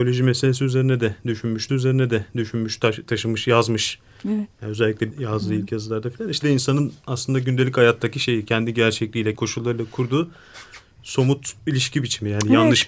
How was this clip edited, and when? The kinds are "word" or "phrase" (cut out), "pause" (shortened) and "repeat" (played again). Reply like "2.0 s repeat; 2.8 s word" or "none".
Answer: 1.7 s repeat; 4.5 s pause; 5.1 s word; 6.4 s phrase; 9.3 s word